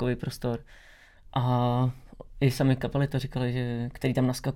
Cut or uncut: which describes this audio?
uncut